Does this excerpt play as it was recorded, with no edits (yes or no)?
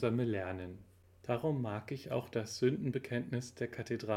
yes